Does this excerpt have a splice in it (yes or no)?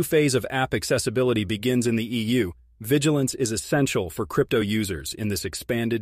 no